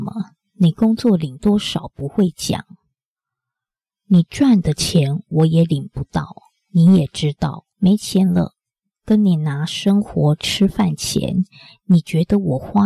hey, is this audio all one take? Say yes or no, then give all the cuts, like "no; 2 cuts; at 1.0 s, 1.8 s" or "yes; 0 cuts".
no; 1 cut; at 7.7 s